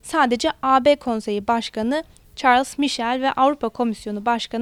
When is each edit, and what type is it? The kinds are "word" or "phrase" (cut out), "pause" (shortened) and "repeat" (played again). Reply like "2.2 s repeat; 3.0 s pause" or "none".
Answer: none